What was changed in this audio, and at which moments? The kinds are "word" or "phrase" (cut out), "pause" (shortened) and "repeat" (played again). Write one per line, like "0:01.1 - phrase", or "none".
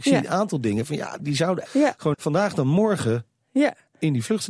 0:01.2 - word
0:01.7 - word
0:02.1 - word